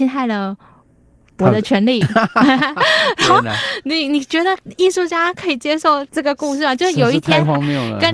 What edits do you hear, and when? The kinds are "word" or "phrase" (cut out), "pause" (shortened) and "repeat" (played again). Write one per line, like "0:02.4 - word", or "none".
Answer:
0:06.1 - pause